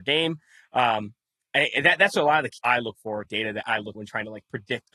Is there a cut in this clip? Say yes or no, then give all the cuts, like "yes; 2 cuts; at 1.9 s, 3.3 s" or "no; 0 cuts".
yes; 3 cuts; at 2.6 s, 3.2 s, 3.9 s